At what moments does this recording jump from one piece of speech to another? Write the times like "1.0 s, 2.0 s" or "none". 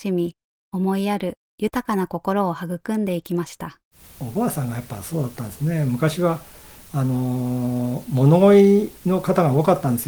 3.9 s